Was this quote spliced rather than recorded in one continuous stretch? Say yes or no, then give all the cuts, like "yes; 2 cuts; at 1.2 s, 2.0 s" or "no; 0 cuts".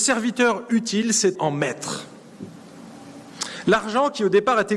yes; 1 cut; at 1.4 s